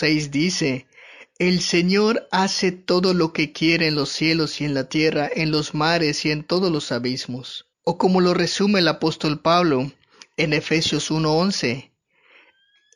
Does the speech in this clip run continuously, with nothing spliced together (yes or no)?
yes